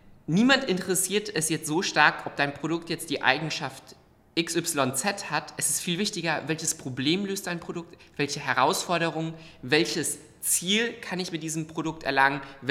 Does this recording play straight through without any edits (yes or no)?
yes